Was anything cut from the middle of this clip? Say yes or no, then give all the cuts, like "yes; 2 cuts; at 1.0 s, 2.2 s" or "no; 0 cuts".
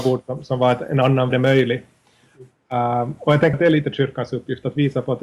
yes; 2 cuts; at 1.3 s, 3.5 s